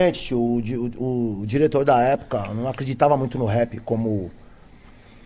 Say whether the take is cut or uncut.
uncut